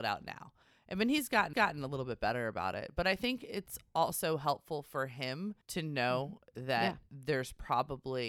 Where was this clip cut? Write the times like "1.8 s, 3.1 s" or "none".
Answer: 1.5 s, 5.6 s